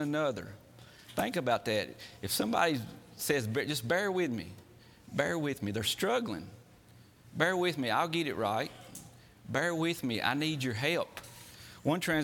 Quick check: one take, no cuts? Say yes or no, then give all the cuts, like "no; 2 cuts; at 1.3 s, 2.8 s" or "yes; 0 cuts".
yes; 0 cuts